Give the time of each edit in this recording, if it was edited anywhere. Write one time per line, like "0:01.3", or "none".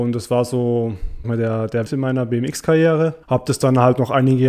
0:01.2
0:01.8
0:03.2